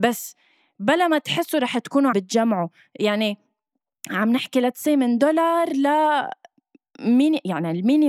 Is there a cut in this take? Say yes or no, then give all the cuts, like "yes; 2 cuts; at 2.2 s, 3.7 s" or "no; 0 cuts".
yes; 1 cut; at 2.1 s